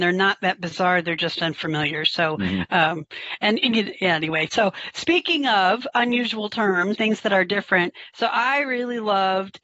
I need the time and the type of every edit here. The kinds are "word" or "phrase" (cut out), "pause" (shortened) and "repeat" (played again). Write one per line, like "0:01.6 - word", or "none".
0:06.9 - word